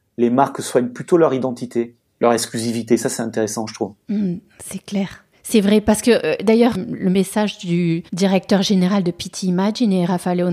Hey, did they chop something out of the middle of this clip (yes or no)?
yes